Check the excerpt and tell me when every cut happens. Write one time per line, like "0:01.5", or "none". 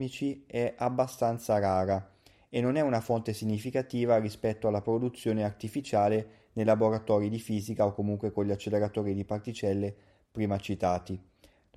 none